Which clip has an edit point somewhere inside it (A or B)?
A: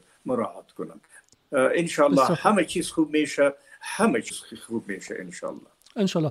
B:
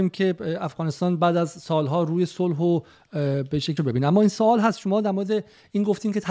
B